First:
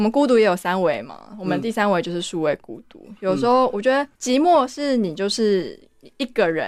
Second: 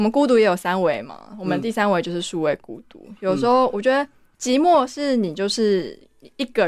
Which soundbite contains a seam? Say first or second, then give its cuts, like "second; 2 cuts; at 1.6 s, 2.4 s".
first; 1 cut; at 4.1 s